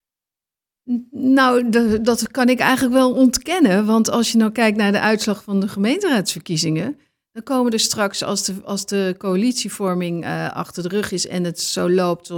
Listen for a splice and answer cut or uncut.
uncut